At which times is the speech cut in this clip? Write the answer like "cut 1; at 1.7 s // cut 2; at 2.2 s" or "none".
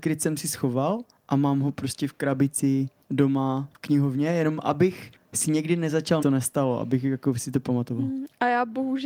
cut 1; at 6.2 s